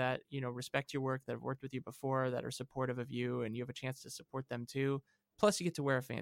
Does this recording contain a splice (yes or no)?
no